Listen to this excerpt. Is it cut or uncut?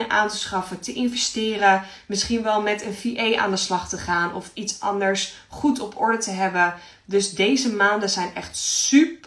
uncut